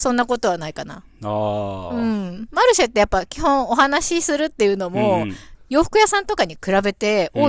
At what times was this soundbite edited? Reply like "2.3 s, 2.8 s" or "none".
5.5 s